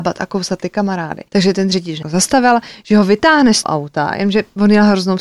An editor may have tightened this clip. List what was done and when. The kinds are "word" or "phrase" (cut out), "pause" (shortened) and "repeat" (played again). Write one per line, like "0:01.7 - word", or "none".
0:01.3 - pause
0:02.0 - phrase
0:03.6 - word